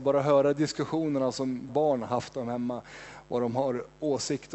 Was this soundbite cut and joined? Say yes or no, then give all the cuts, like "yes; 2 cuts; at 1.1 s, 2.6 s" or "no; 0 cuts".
yes; 1 cut; at 1.7 s